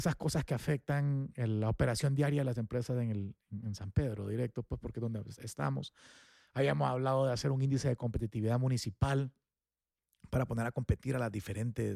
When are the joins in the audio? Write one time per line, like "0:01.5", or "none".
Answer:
none